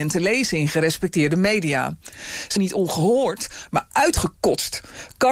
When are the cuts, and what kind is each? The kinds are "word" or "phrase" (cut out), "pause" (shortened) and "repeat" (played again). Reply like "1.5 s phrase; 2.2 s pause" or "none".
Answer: 2.6 s word

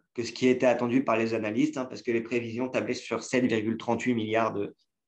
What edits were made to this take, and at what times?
none

